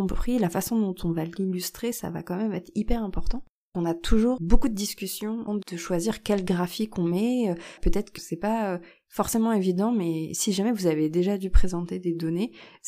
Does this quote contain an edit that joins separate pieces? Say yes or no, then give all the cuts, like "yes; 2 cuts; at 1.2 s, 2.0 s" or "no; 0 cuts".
yes; 2 cuts; at 5.5 s, 8.2 s